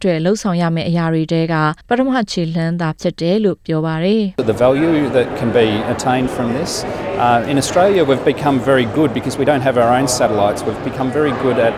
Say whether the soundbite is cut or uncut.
cut